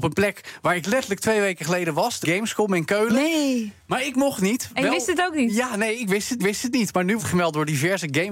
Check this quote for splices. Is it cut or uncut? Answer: cut